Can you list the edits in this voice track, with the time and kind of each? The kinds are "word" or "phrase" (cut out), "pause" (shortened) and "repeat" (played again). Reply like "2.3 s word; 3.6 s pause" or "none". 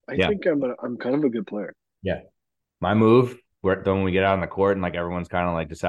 none